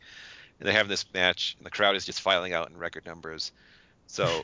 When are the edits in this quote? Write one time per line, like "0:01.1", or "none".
0:01.1